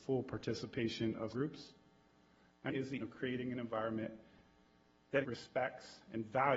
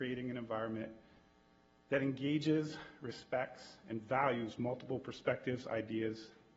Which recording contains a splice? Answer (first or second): first